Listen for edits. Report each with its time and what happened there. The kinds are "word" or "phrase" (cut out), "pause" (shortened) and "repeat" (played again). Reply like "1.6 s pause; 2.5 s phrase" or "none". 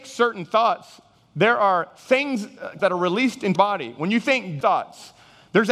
2.8 s word; 3.6 s word; 4.6 s word